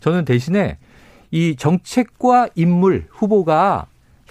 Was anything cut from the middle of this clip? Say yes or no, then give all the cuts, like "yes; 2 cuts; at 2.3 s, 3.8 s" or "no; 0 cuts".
no; 0 cuts